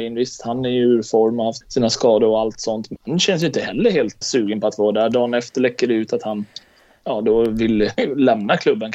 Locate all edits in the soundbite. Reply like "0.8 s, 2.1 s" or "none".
1.6 s, 3.0 s, 4.2 s